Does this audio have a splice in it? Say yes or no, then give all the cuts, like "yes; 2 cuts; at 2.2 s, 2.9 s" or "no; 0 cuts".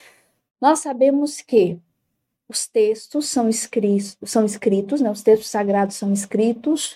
no; 0 cuts